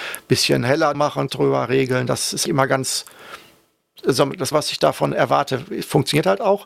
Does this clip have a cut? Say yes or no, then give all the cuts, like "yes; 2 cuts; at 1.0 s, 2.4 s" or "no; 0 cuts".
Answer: yes; 4 cuts; at 0.9 s, 1.3 s, 2.5 s, 4.5 s